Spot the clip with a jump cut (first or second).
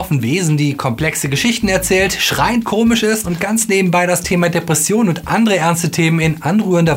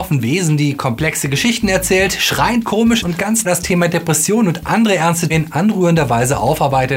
second